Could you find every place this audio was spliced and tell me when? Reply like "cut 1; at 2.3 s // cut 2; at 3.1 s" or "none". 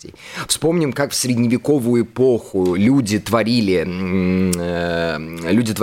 none

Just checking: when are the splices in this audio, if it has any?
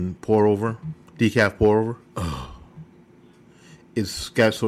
cut 1; at 1.1 s // cut 2; at 2.1 s

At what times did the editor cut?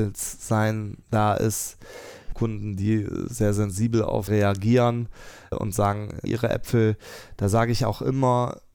cut 1; at 1.0 s // cut 2; at 2.3 s // cut 3; at 4.3 s // cut 4; at 5.5 s // cut 5; at 6.3 s

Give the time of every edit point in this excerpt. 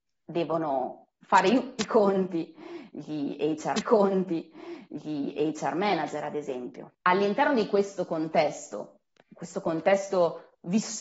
cut 1; at 3.7 s // cut 2; at 9.1 s

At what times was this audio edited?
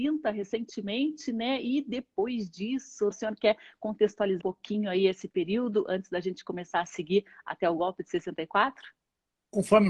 cut 1; at 3.1 s // cut 2; at 4.4 s

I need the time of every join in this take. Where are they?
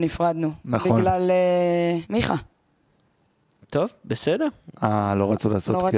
cut 1; at 2.0 s

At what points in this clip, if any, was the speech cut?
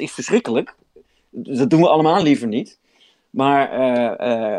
none

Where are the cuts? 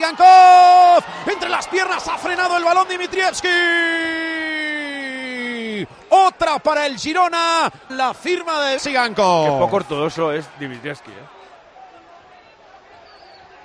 cut 1; at 7.9 s // cut 2; at 8.8 s

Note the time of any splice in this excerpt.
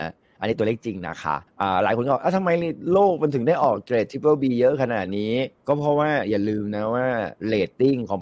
cut 1; at 1.5 s // cut 2; at 5.6 s

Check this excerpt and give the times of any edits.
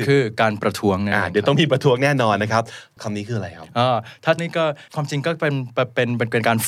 cut 1; at 3.0 s // cut 2; at 4.4 s // cut 3; at 4.9 s

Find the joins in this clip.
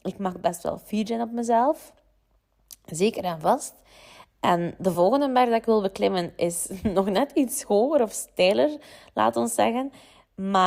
none

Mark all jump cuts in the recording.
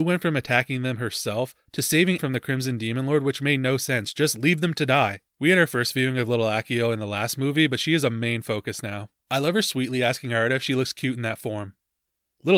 cut 1; at 2.2 s // cut 2; at 5.3 s // cut 3; at 9.2 s

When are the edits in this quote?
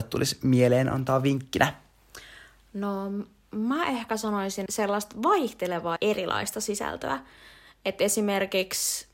cut 1; at 4.7 s // cut 2; at 6.0 s

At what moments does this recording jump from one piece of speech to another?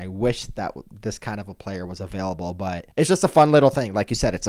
cut 1; at 2.9 s

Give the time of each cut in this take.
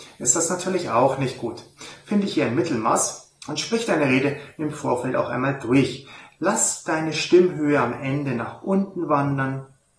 cut 1; at 3.4 s

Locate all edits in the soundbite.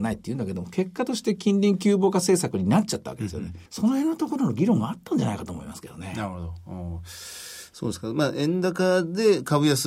cut 1; at 3.7 s

